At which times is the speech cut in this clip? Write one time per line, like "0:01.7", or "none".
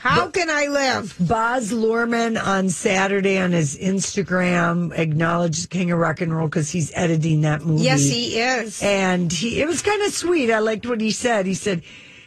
none